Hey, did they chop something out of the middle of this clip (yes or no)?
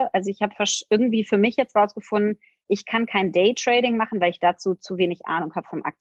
no